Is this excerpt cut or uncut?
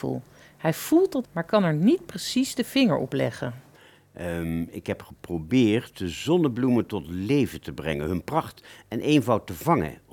cut